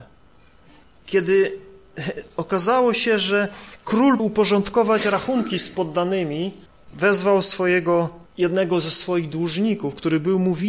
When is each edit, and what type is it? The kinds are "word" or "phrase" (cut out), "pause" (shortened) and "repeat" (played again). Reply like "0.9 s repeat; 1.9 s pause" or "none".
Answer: 4.2 s word; 6.7 s pause; 8.3 s pause